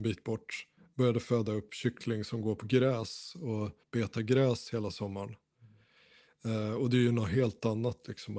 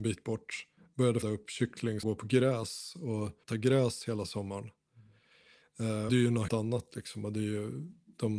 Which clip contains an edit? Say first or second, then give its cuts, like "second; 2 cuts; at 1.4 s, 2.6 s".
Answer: second; 5 cuts; at 1.2 s, 2.0 s, 3.5 s, 6.1 s, 6.5 s